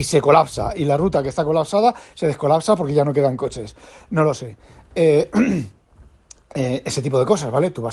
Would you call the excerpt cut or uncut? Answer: uncut